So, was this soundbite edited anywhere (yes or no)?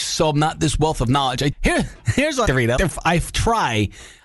yes